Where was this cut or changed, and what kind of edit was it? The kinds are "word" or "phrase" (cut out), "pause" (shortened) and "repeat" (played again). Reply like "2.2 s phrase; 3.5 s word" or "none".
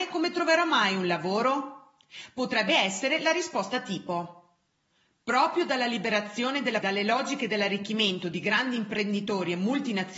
6.8 s word